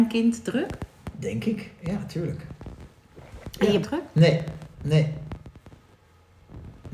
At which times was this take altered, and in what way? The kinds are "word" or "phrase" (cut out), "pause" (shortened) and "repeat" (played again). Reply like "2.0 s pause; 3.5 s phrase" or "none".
3.8 s phrase; 4.7 s pause